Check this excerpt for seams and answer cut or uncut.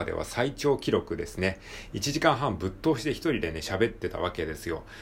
uncut